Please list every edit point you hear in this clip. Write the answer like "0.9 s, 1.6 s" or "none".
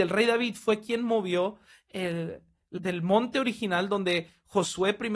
2.8 s